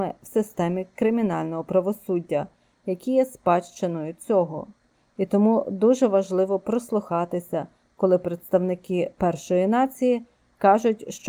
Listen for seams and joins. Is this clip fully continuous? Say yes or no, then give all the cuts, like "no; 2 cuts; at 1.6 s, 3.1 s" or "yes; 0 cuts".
yes; 0 cuts